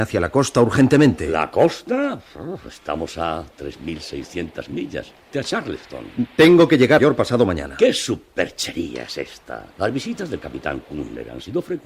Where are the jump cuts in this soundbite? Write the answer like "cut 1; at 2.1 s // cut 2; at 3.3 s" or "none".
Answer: cut 1; at 5.3 s // cut 2; at 7.0 s // cut 3; at 9.7 s